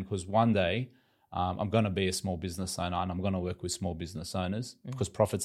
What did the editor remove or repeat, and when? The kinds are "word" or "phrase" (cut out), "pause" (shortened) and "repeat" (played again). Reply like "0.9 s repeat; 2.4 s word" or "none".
none

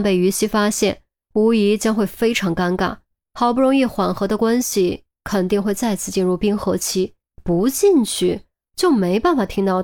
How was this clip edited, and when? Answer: 7.3 s pause

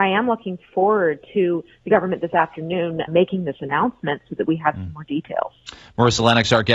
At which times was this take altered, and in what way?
3.1 s word

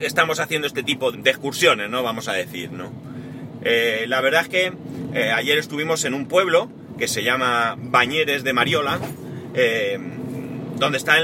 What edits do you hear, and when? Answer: 1.1 s word

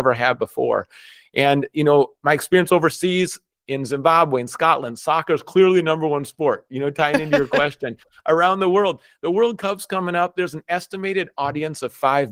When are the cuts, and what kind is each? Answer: none

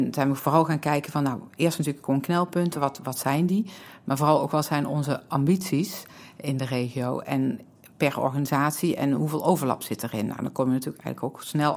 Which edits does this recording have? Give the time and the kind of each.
none

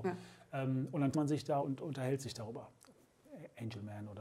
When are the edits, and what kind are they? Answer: 1.1 s word; 1.6 s word

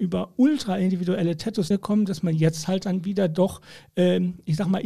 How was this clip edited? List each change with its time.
1.7 s word

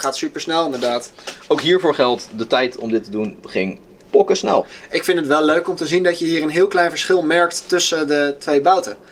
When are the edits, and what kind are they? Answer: none

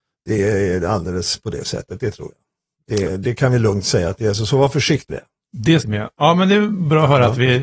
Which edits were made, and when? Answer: 5.1 s word; 5.8 s phrase

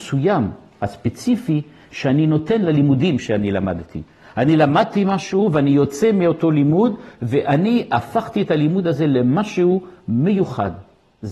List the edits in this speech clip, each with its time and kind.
none

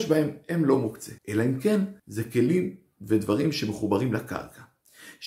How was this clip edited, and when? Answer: 1.2 s pause; 2.0 s pause

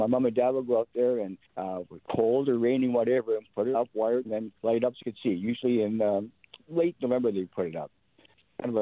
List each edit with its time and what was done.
1.5 s pause; 3.7 s word; 4.2 s phrase; 4.6 s pause; 5.0 s word; 6.6 s pause

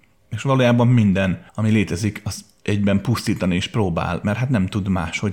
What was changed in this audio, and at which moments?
1.5 s pause

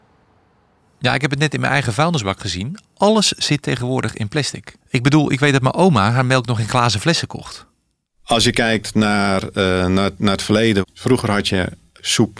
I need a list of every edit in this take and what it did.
4.8 s pause

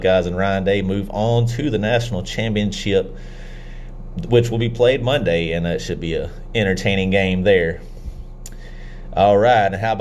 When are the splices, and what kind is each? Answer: none

